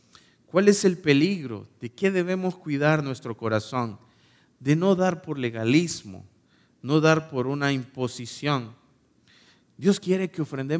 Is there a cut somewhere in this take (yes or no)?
no